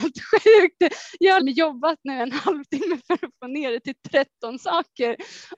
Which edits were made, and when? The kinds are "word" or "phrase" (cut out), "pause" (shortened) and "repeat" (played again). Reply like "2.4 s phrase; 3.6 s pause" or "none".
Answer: 1.4 s word